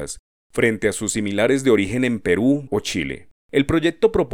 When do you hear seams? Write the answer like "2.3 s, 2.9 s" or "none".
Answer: 2.7 s, 3.4 s

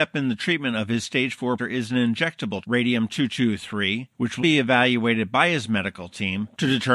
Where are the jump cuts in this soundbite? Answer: 1.6 s, 2.6 s, 4.4 s

